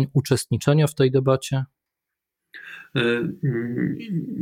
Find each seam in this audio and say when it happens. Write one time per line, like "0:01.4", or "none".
none